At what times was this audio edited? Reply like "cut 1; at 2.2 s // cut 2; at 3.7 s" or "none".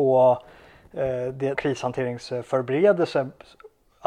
cut 1; at 1.5 s